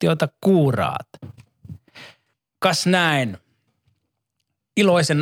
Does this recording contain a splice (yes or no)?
yes